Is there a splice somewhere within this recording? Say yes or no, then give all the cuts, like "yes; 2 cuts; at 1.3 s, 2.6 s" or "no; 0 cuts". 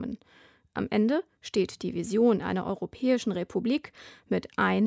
no; 0 cuts